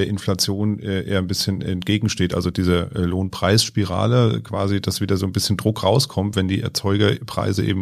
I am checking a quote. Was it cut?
no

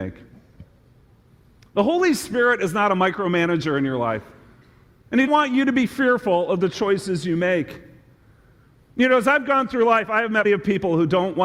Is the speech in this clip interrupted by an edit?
yes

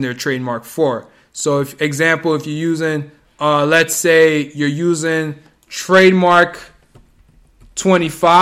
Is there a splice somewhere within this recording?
no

